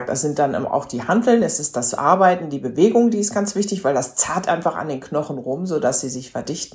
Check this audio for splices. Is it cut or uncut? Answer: uncut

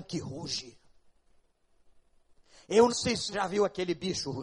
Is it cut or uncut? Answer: cut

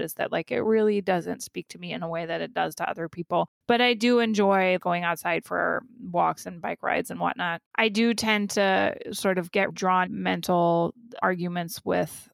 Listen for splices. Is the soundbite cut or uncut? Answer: cut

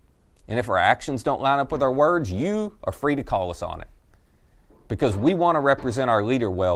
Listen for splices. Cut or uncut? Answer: uncut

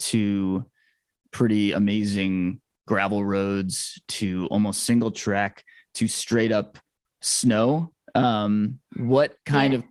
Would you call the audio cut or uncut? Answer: uncut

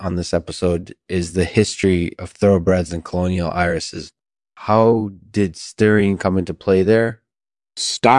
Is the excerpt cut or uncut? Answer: uncut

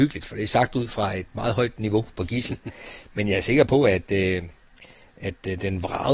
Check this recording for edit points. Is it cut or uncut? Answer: uncut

